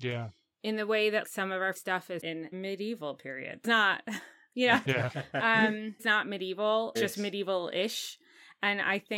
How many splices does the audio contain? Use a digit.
8